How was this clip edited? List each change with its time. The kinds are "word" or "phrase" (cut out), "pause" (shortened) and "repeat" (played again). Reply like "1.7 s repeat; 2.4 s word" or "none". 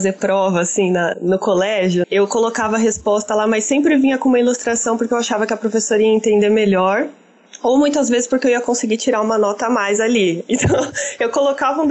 1.1 s word; 2.0 s word